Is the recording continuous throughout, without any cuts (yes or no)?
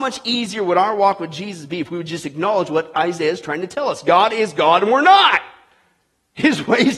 yes